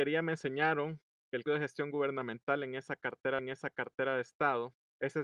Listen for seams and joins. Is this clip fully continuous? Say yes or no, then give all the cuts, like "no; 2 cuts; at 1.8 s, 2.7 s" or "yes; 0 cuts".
no; 2 cuts; at 1.5 s, 3.4 s